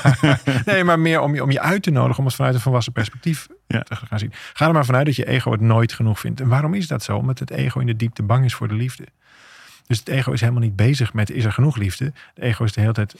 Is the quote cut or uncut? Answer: uncut